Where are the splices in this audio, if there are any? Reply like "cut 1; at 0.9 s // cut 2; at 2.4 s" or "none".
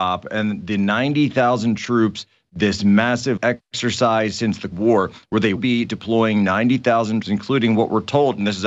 cut 1; at 3.4 s // cut 2; at 4.7 s // cut 3; at 5.6 s // cut 4; at 7.2 s